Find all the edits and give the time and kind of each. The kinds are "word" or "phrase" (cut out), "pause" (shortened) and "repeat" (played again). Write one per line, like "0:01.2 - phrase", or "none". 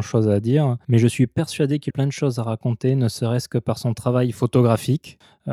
0:01.9 - word